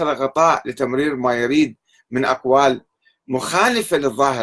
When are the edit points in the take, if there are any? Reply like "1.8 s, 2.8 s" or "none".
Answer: none